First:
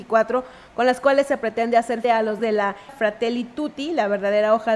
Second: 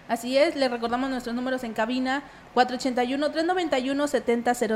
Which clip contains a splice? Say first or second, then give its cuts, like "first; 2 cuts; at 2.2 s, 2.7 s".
first; 3 cuts; at 2.0 s, 2.4 s, 2.9 s